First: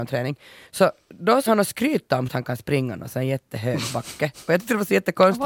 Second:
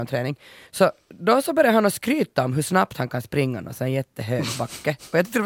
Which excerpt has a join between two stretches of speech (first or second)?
first